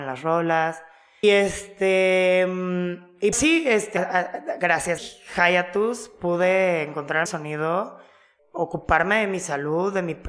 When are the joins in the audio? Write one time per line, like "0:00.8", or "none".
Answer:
0:01.2
0:03.3
0:04.0
0:05.0
0:07.3
0:08.4